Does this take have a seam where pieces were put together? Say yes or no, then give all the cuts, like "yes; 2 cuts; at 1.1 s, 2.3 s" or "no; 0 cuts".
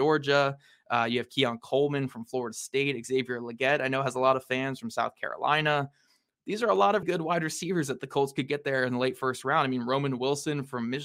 yes; 1 cut; at 7.0 s